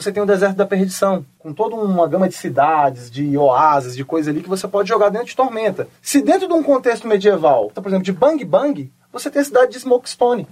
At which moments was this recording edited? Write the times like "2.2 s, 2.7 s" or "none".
7.8 s